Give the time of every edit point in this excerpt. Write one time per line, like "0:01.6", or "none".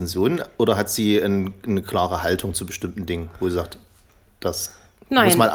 none